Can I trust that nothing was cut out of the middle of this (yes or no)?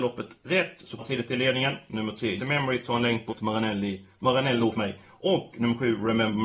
no